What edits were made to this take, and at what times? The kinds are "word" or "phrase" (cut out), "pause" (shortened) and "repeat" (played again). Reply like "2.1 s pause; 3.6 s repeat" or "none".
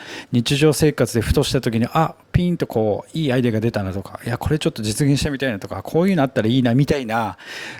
2.2 s pause